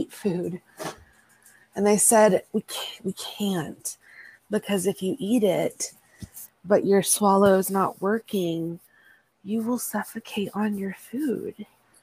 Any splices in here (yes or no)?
no